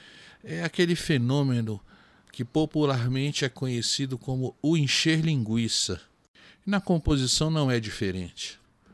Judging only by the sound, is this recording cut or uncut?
uncut